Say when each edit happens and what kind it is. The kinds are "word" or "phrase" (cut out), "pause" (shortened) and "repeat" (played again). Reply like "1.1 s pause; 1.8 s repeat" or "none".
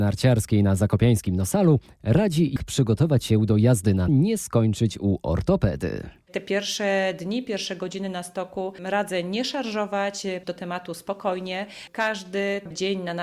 2.6 s word; 4.1 s phrase; 10.4 s word